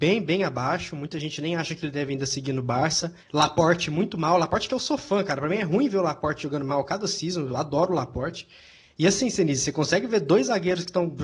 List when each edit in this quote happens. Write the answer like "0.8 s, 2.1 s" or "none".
3.2 s

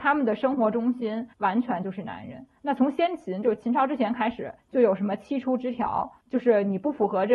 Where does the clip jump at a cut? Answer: 1.3 s, 2.6 s, 4.6 s, 6.2 s

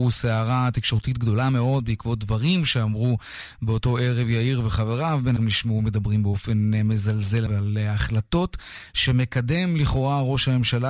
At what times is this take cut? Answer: 5.4 s, 7.5 s

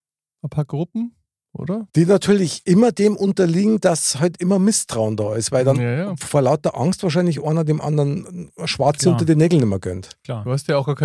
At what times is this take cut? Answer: 1.9 s

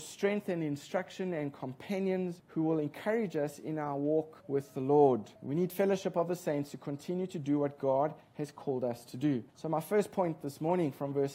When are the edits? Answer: 2.4 s, 4.4 s, 5.4 s, 9.5 s

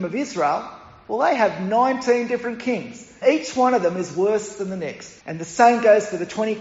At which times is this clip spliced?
3.2 s, 5.2 s

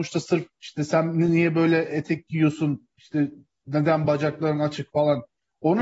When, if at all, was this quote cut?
none

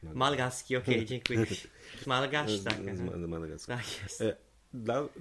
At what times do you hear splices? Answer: 2.0 s, 3.7 s

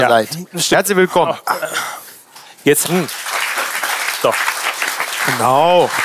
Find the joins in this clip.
2.8 s

